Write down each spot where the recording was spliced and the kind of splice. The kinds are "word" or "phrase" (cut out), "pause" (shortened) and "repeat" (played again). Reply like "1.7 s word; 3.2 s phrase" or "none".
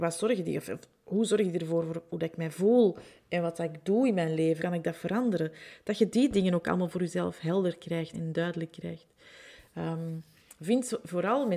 4.6 s word; 8.1 s word